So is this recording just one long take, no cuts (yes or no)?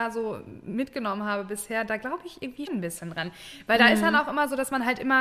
no